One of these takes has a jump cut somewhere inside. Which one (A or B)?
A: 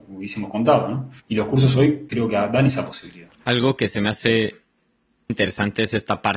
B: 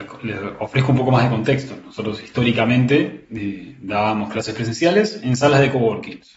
A